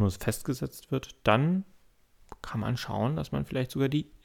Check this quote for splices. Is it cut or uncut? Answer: uncut